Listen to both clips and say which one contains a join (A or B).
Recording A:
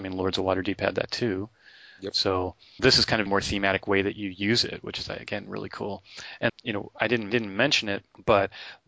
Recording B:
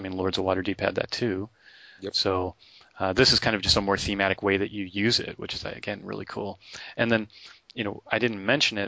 A